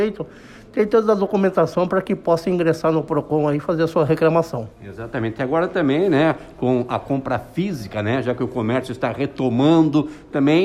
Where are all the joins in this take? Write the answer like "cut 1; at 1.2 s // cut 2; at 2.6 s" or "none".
cut 1; at 4.7 s